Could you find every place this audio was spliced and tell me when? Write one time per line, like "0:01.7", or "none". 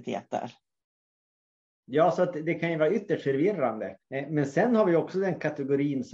0:04.0